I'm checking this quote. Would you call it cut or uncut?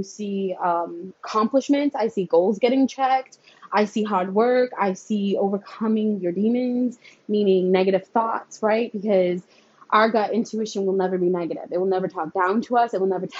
uncut